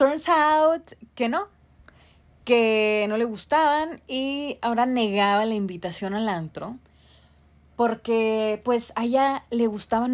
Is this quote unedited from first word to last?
yes; 0 cuts

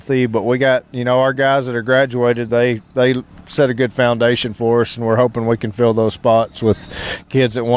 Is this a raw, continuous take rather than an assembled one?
yes; 0 cuts

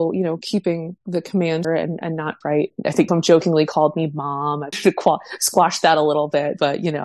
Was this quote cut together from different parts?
yes; 5 cuts; at 1.6 s, 2.4 s, 2.8 s, 3.1 s, 4.7 s

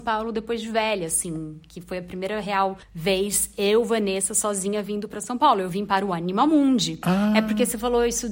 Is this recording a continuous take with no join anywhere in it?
no; 1 cut; at 2.8 s

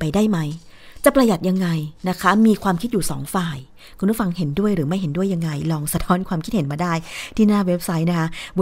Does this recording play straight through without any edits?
no; 1 cut; at 2.0 s

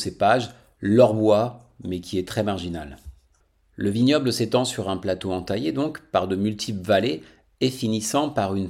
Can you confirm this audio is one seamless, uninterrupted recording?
yes; 0 cuts

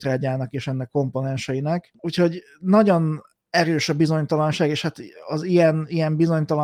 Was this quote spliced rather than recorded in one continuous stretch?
no; 0 cuts

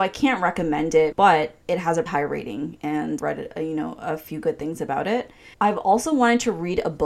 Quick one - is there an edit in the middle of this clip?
yes; 5 cuts; at 1.1 s, 1.6 s, 2.1 s, 3.2 s, 5.5 s

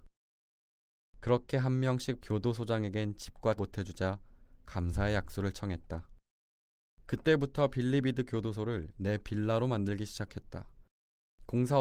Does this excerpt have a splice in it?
yes; 2 cuts; at 2.2 s, 3.6 s

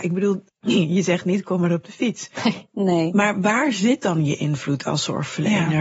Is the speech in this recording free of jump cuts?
yes; 0 cuts

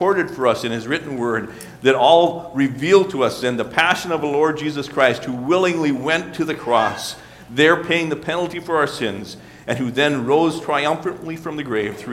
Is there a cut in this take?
no; 0 cuts

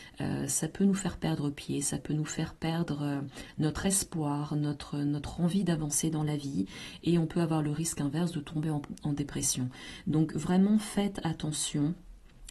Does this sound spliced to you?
no; 0 cuts

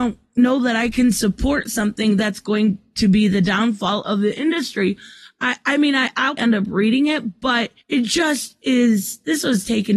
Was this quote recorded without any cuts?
no; 2 cuts; at 6.4 s, 7.8 s

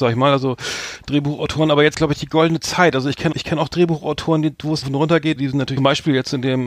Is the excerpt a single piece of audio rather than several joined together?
no; 5 cuts; at 1.9 s, 3.3 s, 4.8 s, 5.4 s, 5.8 s

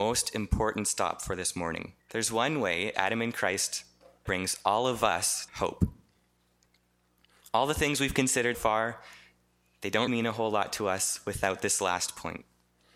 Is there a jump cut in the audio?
yes; 6 cuts; at 2.0 s, 2.9 s, 4.3 s, 5.5 s, 8.5 s, 10.1 s

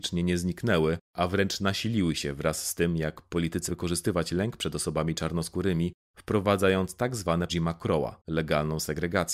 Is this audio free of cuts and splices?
no; 3 cuts; at 3.7 s, 7.5 s, 8.2 s

